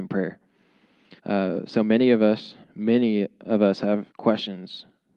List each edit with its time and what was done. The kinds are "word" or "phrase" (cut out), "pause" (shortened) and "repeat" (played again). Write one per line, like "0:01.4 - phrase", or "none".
0:01.2 - pause
0:02.6 - pause
0:04.1 - pause